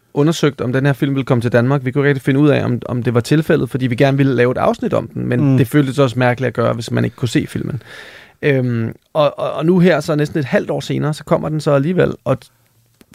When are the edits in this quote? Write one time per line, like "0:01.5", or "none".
none